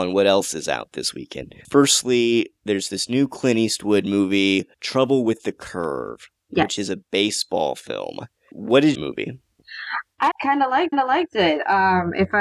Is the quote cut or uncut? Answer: cut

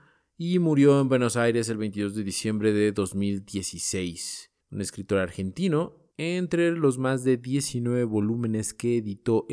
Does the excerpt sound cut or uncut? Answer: cut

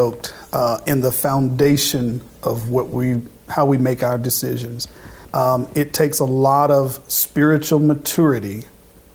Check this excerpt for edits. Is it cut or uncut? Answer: cut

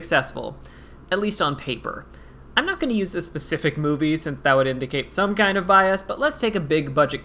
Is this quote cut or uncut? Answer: cut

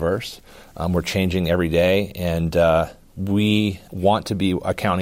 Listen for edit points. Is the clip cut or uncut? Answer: cut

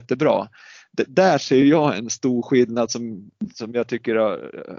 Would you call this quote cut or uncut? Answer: uncut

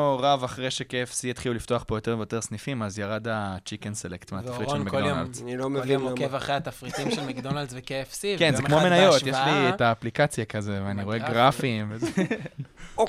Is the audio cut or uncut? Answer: uncut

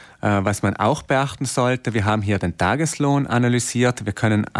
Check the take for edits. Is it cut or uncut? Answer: uncut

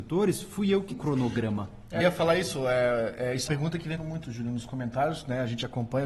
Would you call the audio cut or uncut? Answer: cut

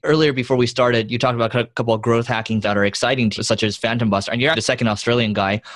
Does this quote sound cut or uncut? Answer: cut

